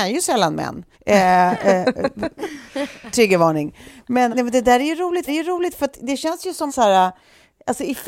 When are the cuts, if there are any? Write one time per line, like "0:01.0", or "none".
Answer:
0:00.9
0:04.3
0:05.3
0:06.7